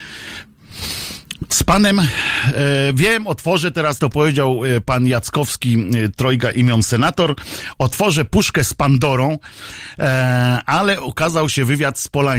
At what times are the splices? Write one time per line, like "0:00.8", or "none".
0:04.0